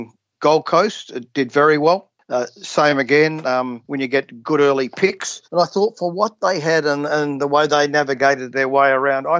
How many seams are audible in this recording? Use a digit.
2